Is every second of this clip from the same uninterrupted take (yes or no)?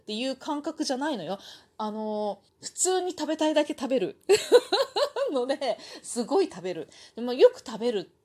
no